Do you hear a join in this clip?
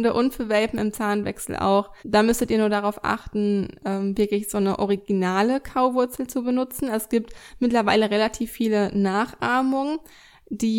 yes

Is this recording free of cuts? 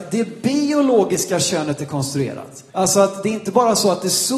no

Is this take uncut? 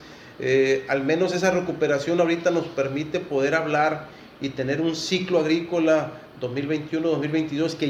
yes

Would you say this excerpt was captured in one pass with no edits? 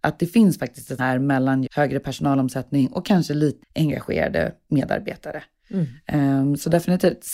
no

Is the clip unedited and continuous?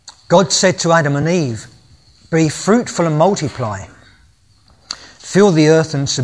yes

